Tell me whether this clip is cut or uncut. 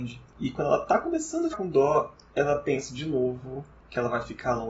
cut